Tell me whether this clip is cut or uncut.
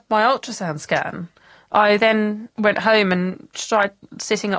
uncut